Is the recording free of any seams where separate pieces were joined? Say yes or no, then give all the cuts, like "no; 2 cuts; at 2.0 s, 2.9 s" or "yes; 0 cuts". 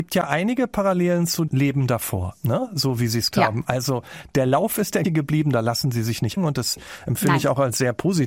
no; 4 cuts; at 1.5 s, 3.3 s, 5.0 s, 6.4 s